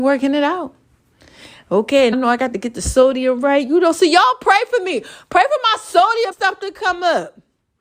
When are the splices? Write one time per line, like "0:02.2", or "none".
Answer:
0:02.1
0:06.3